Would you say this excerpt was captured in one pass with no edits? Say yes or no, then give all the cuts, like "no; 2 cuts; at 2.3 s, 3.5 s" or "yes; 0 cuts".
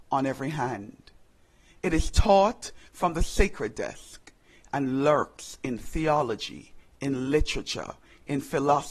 yes; 0 cuts